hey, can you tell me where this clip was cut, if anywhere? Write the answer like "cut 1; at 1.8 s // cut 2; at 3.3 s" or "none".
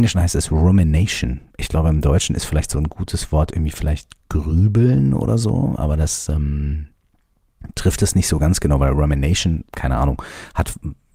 cut 1; at 9.7 s